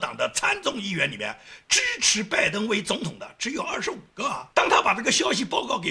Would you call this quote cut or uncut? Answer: cut